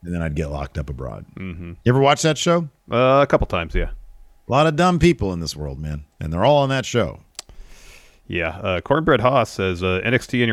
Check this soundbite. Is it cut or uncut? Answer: uncut